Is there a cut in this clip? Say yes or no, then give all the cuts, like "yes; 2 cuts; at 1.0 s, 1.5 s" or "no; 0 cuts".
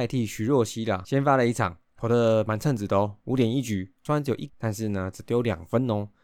yes; 1 cut; at 4.5 s